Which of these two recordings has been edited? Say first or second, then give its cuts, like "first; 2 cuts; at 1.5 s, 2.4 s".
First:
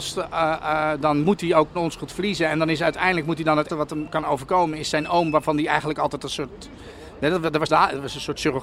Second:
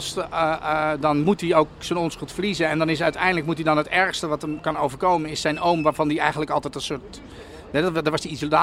first; 3 cuts; at 1.7 s, 3.7 s, 7.7 s